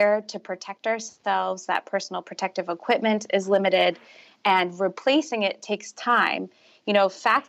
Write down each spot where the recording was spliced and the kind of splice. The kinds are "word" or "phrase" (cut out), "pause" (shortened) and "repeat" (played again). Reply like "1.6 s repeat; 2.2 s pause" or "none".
none